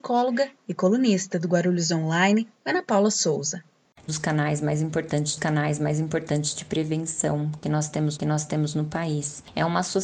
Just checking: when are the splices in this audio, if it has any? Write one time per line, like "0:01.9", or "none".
0:02.5
0:04.1
0:05.4
0:08.2